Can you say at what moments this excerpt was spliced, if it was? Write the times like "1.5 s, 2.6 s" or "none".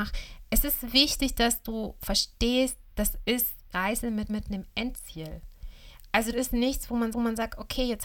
3.7 s, 4.3 s, 6.3 s, 7.1 s